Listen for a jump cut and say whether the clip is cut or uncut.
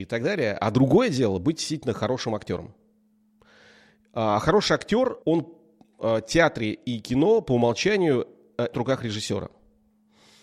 cut